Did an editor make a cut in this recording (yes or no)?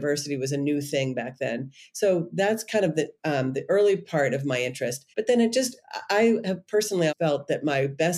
yes